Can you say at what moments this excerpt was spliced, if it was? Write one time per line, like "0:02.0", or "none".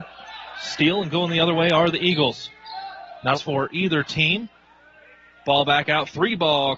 0:03.3